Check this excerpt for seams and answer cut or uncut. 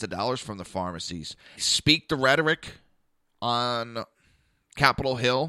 cut